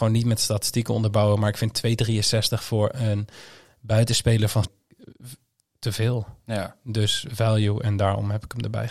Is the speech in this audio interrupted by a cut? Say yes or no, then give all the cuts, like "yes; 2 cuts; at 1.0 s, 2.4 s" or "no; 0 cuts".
yes; 1 cut; at 4.6 s